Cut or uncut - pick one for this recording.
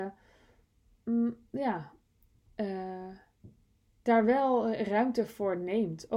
uncut